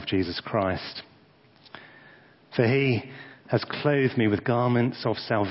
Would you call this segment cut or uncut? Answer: uncut